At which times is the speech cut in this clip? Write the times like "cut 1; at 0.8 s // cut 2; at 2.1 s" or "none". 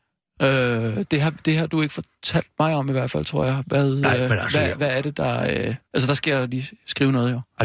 cut 1; at 5.8 s